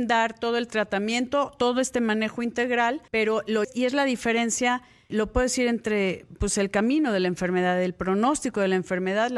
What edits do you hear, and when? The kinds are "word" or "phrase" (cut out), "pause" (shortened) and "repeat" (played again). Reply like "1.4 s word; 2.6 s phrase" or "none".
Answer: 3.1 s pause; 3.6 s word; 5.1 s word